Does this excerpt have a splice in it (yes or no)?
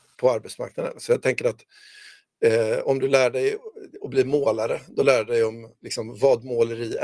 no